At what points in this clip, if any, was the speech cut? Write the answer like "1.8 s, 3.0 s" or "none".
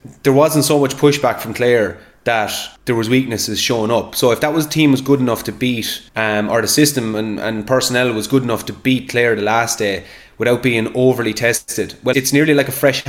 2.8 s, 6.1 s, 12.1 s